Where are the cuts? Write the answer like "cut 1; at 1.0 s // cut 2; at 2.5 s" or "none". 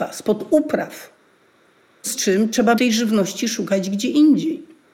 cut 1; at 2.0 s // cut 2; at 2.7 s